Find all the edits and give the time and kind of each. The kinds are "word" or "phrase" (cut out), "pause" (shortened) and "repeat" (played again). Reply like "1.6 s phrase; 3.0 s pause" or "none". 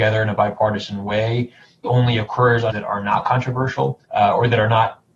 1.8 s word; 2.7 s word; 4.0 s pause